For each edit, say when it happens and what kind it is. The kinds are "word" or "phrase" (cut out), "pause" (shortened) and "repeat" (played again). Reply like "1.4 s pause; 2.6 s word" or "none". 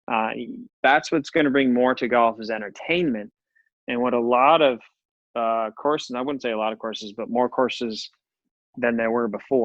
none